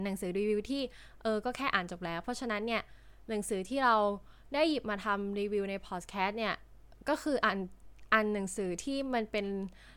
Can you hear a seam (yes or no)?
no